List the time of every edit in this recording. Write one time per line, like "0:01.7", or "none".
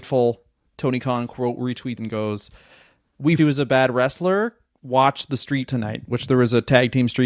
0:02.0
0:03.4
0:05.7